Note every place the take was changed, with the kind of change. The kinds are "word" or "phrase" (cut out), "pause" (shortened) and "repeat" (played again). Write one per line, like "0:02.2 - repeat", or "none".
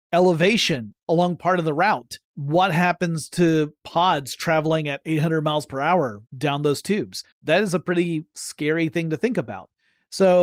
0:02.2 - pause
0:06.3 - pause
0:07.3 - pause